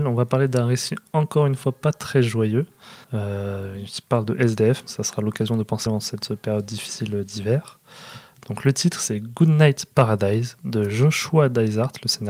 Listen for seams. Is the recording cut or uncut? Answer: cut